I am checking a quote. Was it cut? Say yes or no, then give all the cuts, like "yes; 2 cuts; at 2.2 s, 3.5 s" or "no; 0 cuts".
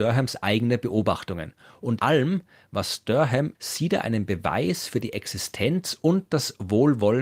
yes; 2 cuts; at 2.0 s, 3.5 s